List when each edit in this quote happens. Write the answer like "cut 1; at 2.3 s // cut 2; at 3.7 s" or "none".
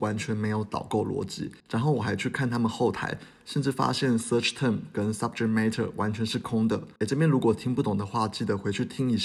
cut 1; at 1.6 s // cut 2; at 7.0 s